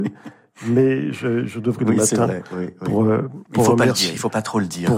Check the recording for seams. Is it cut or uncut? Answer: cut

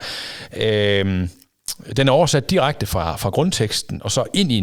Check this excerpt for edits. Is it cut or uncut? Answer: uncut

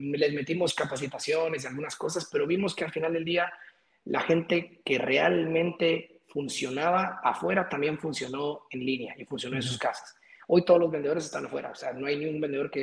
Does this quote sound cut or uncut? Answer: uncut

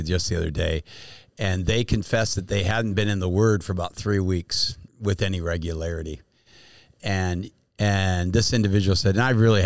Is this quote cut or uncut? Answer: cut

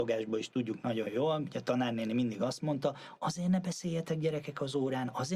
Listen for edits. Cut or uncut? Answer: uncut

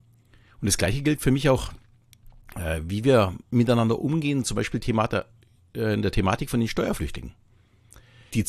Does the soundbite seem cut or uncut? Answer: uncut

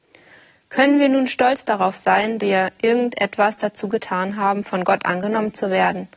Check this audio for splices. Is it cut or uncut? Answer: cut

